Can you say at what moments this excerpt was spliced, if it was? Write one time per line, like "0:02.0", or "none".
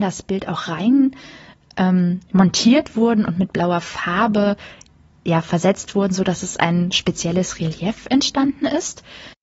none

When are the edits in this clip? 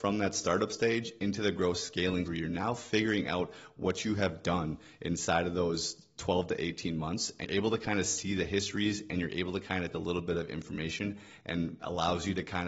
0:02.3
0:07.4
0:09.9

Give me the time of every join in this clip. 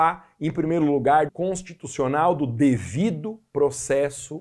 0:01.3

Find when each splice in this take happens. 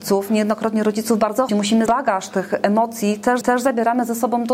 0:01.5
0:01.9
0:03.4

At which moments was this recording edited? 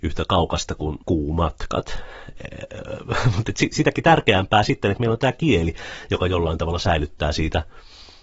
none

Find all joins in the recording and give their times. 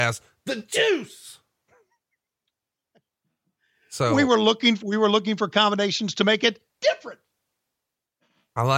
0:06.7

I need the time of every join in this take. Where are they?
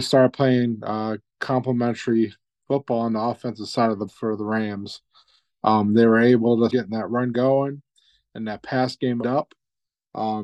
0:04.1
0:06.7
0:07.3
0:09.2

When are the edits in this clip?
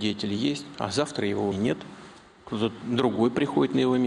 0:01.5

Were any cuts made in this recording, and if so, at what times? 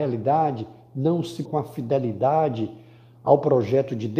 0:01.5

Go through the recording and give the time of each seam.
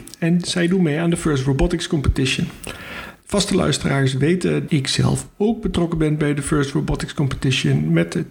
0:04.7

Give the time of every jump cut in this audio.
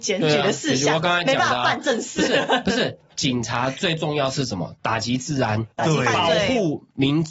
none

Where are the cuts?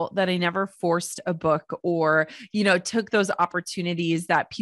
none

